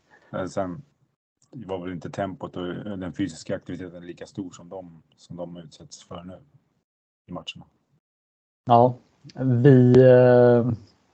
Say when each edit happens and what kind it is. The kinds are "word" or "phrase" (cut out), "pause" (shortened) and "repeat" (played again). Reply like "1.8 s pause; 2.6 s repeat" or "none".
none